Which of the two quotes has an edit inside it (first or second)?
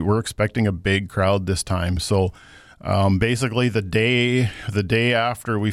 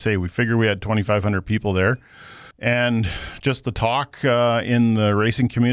second